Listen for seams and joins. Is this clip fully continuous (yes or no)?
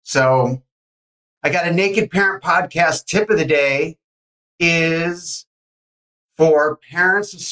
yes